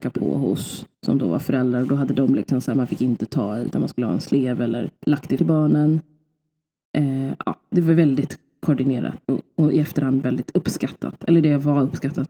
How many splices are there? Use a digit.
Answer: 5